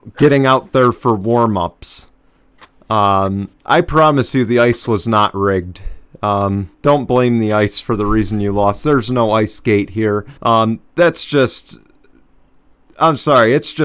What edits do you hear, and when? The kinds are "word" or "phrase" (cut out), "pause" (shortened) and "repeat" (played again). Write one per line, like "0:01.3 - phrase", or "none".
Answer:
0:03.6 - pause
0:06.7 - pause
0:10.4 - pause